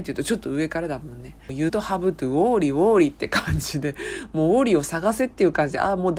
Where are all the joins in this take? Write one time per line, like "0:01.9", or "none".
0:01.7